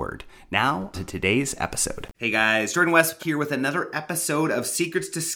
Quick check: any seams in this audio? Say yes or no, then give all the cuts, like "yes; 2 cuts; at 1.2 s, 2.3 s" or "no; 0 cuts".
yes; 3 cuts; at 0.9 s, 2.1 s, 3.2 s